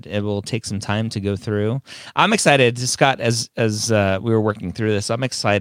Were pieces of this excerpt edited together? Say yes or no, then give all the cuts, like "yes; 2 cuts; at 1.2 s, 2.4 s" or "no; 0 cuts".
no; 0 cuts